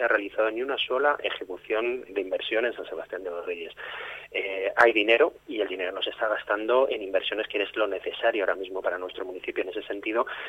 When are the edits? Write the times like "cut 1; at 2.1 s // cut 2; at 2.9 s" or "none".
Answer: cut 1; at 2.1 s // cut 2; at 8.8 s